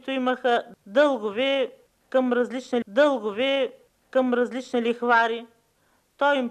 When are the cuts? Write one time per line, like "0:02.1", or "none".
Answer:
0:02.8